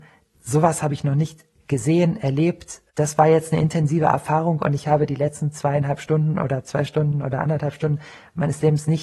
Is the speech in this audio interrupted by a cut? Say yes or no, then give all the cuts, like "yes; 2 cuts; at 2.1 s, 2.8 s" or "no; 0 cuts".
no; 0 cuts